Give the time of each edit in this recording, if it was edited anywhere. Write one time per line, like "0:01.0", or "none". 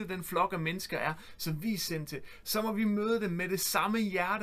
none